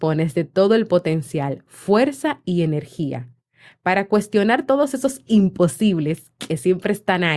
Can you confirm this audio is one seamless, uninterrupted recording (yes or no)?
yes